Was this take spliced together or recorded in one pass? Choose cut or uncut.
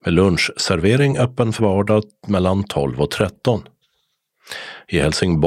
cut